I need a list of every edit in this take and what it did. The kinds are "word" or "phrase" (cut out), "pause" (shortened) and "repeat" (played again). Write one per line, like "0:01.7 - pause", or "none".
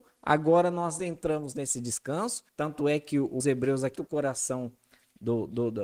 0:01.0 - phrase
0:02.5 - pause
0:03.4 - phrase
0:04.0 - word